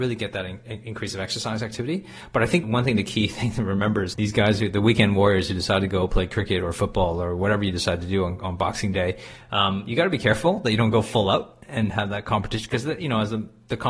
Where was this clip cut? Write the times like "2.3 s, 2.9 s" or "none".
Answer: 2.6 s, 4.1 s